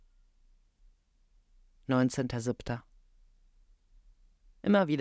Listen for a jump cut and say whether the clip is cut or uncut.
uncut